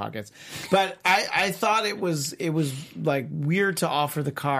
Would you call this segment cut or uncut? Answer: uncut